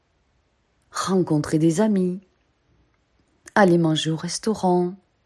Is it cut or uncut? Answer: uncut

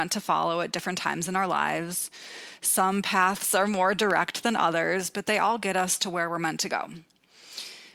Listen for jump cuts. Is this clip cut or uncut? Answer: uncut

